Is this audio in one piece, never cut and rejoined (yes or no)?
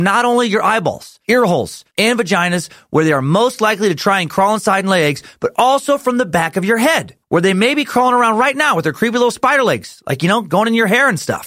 no